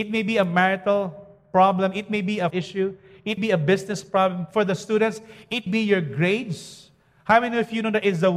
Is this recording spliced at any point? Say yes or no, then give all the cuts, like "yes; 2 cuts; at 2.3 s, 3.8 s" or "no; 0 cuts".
yes; 3 cuts; at 2.5 s, 3.4 s, 5.7 s